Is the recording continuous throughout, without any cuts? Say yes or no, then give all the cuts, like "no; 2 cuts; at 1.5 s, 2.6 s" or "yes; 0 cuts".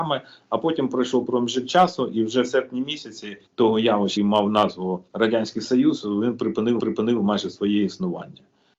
no; 5 cuts; at 1.3 s, 3.5 s, 4.2 s, 5.1 s, 6.8 s